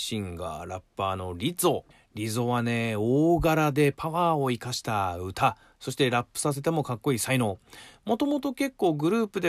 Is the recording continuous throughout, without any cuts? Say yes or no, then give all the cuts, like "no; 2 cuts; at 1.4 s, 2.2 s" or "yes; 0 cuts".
no; 1 cut; at 1.9 s